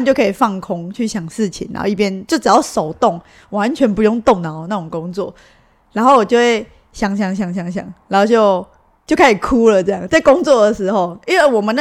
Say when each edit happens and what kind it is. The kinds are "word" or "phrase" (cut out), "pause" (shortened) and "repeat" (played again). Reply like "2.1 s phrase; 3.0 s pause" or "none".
none